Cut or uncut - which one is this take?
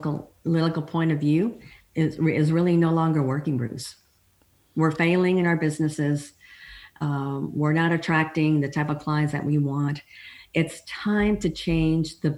uncut